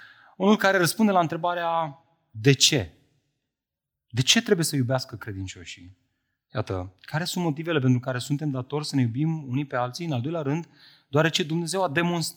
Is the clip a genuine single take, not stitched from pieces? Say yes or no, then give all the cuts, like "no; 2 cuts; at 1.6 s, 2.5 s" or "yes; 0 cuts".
yes; 0 cuts